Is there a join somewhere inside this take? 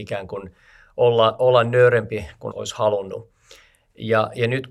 yes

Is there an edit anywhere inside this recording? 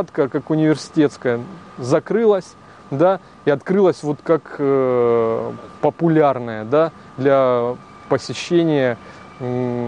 no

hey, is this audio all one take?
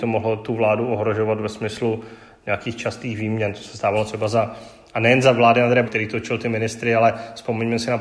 no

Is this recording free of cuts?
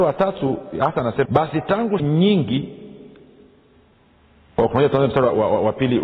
no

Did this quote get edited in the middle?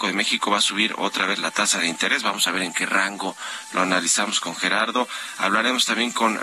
no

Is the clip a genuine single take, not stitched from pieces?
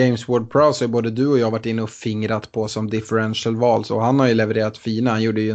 yes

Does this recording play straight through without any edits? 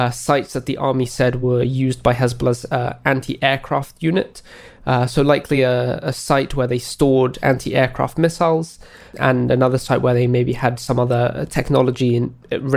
yes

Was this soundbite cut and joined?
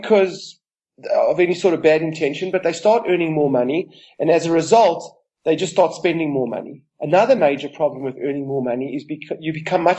no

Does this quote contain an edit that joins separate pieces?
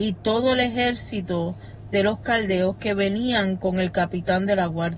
no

